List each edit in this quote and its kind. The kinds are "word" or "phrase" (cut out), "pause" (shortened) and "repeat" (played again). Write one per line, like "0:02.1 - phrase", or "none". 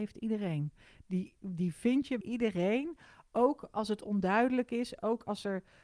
0:02.2 - word